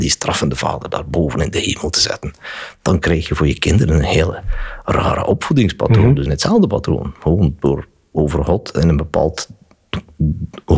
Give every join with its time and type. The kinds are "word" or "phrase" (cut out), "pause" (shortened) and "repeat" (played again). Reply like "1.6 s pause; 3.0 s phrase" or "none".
6.3 s phrase